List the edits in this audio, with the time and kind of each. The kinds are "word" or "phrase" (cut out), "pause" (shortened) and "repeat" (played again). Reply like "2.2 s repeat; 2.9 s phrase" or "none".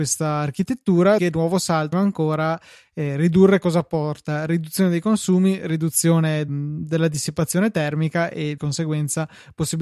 1.2 s word; 1.9 s phrase; 6.5 s word; 8.6 s word